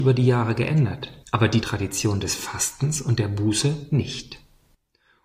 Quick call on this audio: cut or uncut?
cut